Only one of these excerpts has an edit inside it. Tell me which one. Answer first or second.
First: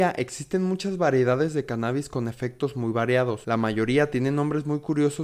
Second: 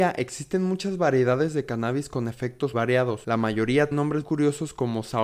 second